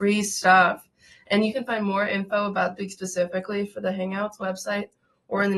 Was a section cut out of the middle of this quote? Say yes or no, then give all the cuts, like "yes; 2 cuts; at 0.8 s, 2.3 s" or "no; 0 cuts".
yes; 2 cuts; at 2.8 s, 4.4 s